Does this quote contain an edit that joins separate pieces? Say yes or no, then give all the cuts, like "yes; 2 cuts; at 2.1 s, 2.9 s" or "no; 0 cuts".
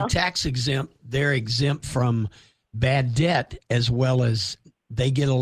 no; 0 cuts